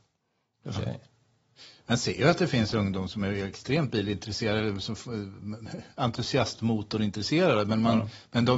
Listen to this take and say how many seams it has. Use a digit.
0